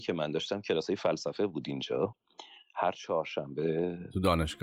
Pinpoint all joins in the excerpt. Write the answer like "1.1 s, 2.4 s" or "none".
none